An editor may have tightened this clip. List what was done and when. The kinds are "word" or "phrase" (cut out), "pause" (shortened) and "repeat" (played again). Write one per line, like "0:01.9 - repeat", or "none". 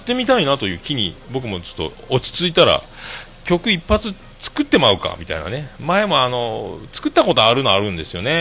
0:01.2 - word